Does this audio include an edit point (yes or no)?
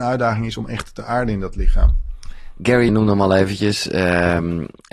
yes